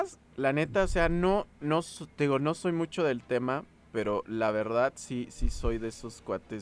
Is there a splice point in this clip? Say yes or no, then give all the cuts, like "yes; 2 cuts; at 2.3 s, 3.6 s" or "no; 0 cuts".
no; 0 cuts